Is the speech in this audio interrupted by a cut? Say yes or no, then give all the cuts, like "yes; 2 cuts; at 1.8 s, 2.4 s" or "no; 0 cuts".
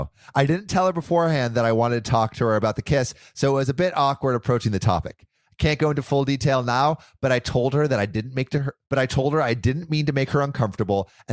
yes; 1 cut; at 8.8 s